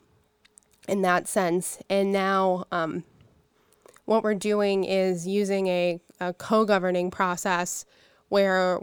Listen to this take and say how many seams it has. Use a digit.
0